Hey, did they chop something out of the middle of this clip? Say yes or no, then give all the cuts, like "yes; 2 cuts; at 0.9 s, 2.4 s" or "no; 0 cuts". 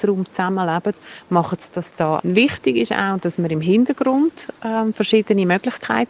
yes; 1 cut; at 2.2 s